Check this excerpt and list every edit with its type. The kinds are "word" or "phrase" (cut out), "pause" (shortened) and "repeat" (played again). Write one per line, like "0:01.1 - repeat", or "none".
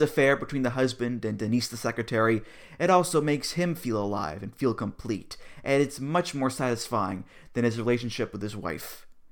none